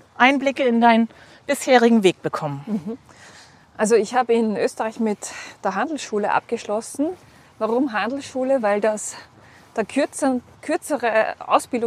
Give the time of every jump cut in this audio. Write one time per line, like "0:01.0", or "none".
none